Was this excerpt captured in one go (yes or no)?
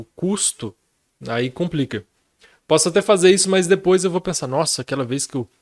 yes